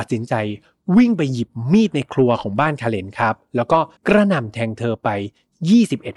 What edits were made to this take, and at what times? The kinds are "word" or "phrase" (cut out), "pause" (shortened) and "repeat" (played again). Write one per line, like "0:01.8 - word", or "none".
0:04.0 - pause